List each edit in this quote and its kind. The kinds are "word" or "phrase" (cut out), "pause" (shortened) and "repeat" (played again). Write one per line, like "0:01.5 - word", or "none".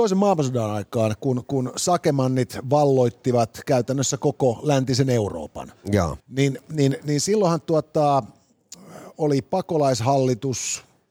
0:06.2 - pause